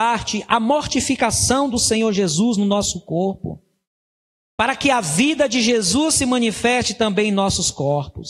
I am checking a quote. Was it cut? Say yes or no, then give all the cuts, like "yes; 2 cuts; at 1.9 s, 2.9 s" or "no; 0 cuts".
no; 0 cuts